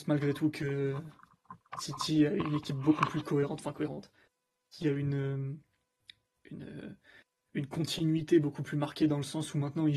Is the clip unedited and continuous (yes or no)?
yes